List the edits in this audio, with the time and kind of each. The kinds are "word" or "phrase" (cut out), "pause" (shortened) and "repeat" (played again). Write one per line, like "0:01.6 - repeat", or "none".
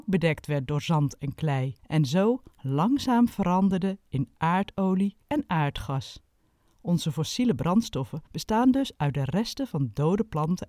0:01.8 - pause
0:05.2 - pause
0:06.4 - pause
0:08.3 - pause